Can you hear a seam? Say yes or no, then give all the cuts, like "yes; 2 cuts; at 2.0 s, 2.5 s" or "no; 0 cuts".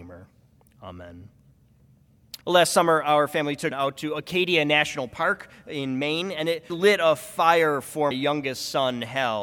yes; 4 cuts; at 2.4 s, 3.7 s, 6.7 s, 8.1 s